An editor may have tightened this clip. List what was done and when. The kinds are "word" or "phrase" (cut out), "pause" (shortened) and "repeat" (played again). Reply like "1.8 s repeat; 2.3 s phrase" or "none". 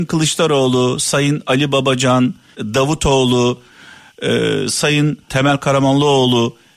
2.5 s word; 5.3 s word